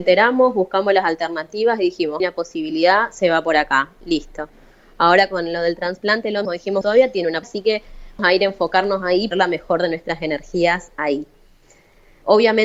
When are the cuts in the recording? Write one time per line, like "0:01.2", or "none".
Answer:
0:02.2
0:06.4
0:06.8
0:07.4
0:08.2
0:09.3